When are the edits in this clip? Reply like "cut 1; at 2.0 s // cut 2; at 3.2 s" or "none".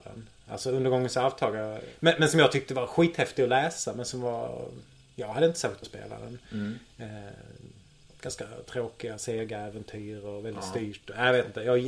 cut 1; at 5.8 s